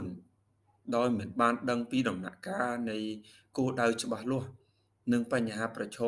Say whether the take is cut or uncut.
uncut